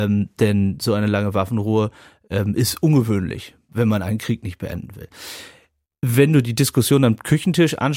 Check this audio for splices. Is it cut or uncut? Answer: uncut